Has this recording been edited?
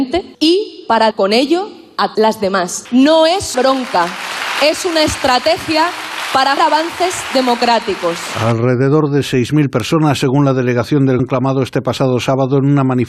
yes; 5 cuts; at 1.1 s, 2.2 s, 3.5 s, 6.6 s, 11.2 s

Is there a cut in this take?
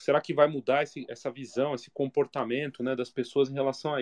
no; 0 cuts

